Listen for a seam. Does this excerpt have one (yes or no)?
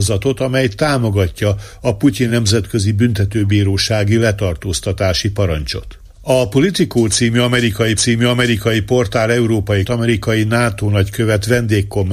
yes